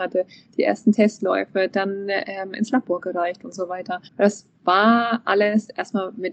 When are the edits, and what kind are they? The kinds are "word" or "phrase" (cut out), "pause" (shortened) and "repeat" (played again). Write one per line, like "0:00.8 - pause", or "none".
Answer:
0:04.1 - pause